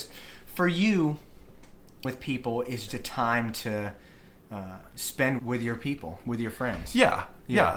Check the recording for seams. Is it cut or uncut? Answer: cut